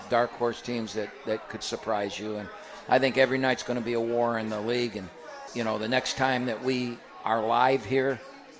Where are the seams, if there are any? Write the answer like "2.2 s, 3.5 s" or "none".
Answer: 5.5 s